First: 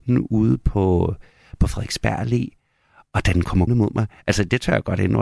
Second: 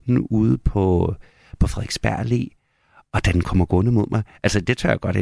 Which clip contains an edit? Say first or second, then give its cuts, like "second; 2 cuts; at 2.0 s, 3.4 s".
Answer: first; 1 cut; at 3.7 s